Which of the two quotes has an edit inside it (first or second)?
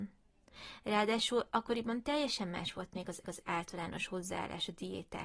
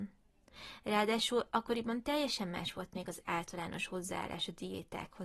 first